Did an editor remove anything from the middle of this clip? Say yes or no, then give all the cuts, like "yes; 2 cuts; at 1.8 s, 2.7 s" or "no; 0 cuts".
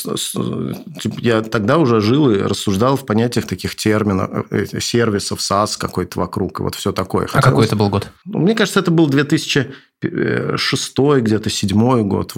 no; 0 cuts